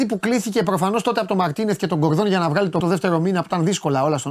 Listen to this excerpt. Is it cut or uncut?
cut